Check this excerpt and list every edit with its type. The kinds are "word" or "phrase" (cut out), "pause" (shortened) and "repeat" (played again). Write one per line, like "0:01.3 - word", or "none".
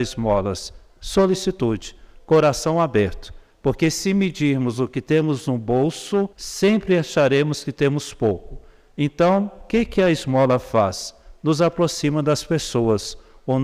0:06.3 - pause